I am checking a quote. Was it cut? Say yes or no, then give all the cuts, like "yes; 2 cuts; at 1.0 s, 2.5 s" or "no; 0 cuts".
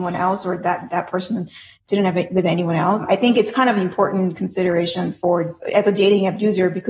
no; 0 cuts